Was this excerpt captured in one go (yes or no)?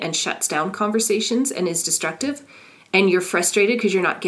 yes